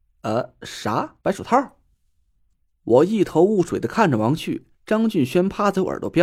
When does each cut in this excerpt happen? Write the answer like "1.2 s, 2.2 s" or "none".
1.2 s, 4.7 s